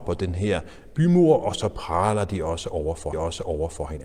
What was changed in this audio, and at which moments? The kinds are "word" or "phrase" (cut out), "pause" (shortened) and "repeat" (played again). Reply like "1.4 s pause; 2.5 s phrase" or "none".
3.1 s repeat